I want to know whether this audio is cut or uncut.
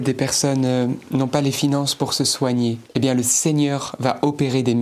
cut